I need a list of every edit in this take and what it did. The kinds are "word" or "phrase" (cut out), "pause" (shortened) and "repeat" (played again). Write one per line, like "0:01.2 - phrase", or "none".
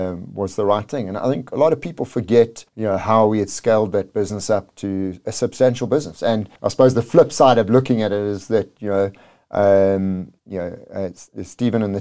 0:02.7 - pause
0:06.6 - pause
0:10.4 - pause

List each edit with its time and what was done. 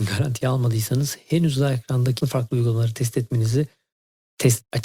0:02.2 - word

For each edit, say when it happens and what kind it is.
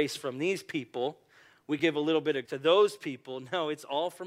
0:01.8 - word
0:02.4 - word

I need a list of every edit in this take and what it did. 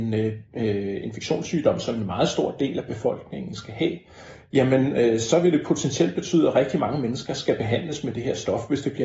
none

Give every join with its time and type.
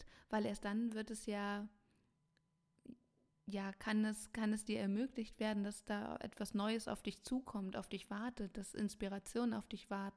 none

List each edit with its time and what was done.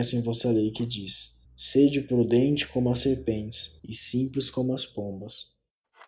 0:01.4 - pause
0:03.8 - pause

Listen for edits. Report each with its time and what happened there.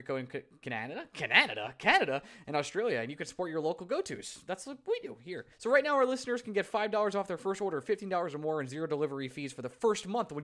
0:05.5 - pause

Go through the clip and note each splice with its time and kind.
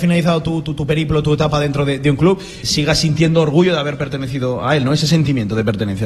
0:02.6 - word

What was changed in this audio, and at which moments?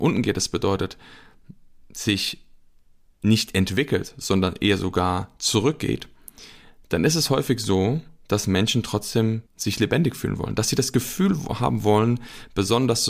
0:09.5 - pause

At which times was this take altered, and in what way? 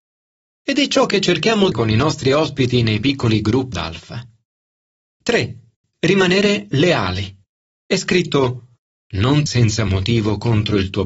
0:01.7 - phrase
0:03.7 - word
0:05.7 - pause
0:07.6 - pause
0:09.5 - word

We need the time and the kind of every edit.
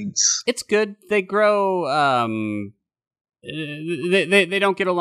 none

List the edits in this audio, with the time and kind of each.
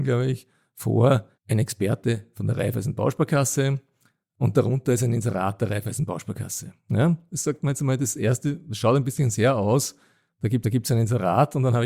0:01.3 - pause
0:10.6 - repeat

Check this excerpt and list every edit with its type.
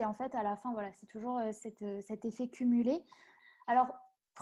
none

